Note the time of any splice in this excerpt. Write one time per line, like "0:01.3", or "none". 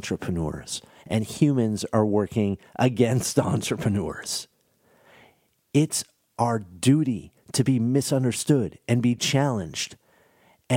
none